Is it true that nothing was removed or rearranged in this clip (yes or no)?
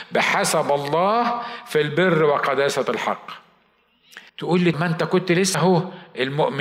no